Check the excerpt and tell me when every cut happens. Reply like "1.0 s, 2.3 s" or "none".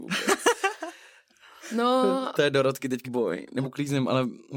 3.0 s, 3.6 s